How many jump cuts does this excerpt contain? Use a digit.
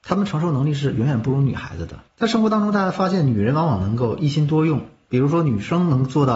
1